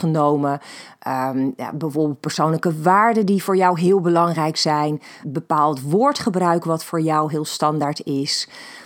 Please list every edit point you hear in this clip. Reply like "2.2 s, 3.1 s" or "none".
5.2 s